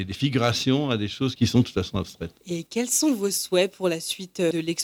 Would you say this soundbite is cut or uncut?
uncut